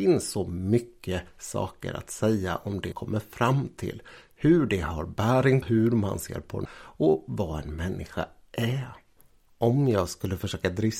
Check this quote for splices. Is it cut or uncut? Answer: cut